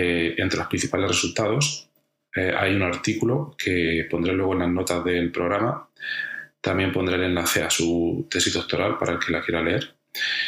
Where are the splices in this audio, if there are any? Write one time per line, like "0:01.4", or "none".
none